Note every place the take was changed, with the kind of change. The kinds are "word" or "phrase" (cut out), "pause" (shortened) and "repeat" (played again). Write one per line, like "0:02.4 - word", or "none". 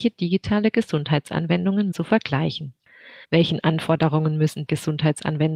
0:01.9 - word
0:03.2 - pause
0:04.7 - word